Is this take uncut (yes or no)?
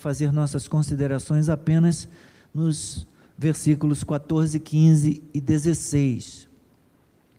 yes